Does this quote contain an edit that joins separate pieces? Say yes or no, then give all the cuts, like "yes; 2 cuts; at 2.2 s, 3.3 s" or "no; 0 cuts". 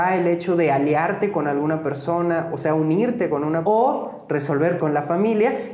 yes; 2 cuts; at 3.6 s, 4.8 s